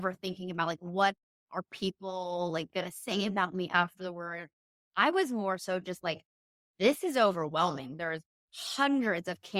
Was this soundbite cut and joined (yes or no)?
no